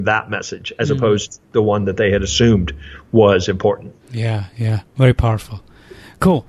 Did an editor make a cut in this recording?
yes; 3 cuts; at 1.4 s, 4.0 s, 4.9 s

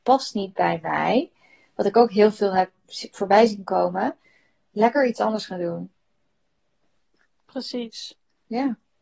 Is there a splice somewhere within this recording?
no; 0 cuts

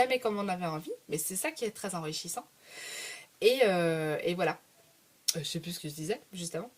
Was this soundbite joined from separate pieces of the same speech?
no; 0 cuts

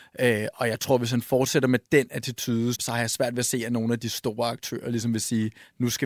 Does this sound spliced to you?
yes; 1 cut; at 2.7 s

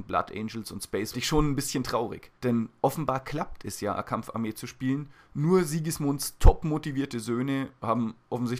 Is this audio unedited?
no; 3 cuts; at 1.1 s, 2.4 s, 4.0 s

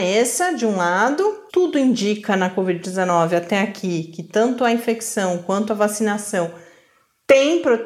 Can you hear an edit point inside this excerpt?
yes; 1 cut; at 1.5 s

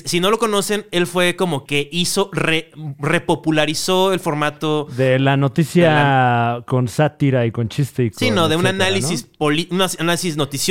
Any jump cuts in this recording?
yes; 1 cut; at 1.7 s

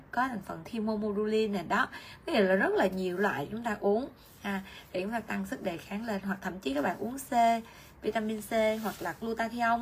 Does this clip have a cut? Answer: no; 0 cuts

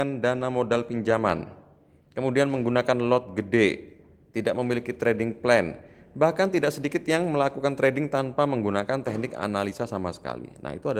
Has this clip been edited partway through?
no; 0 cuts

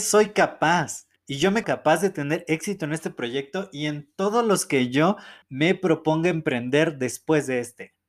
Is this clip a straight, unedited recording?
no; 3 cuts; at 1.2 s, 1.6 s, 5.4 s

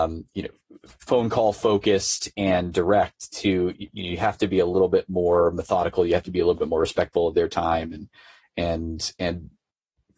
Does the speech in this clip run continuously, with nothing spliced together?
yes; 0 cuts

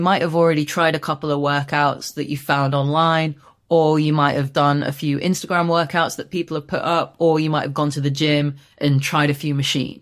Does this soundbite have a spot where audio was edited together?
no; 0 cuts

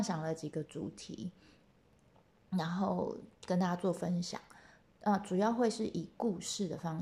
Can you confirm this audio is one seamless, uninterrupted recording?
yes; 0 cuts

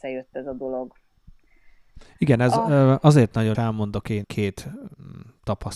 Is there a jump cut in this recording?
yes; 2 cuts; at 3.5 s, 4.2 s

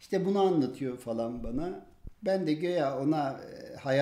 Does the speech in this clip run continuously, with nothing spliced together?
yes; 0 cuts

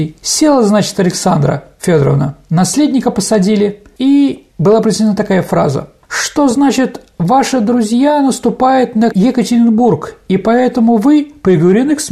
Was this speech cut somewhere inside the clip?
no; 0 cuts

